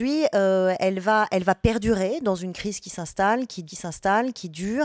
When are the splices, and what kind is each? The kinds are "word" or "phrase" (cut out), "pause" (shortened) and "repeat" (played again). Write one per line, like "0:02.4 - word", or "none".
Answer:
0:03.7 - repeat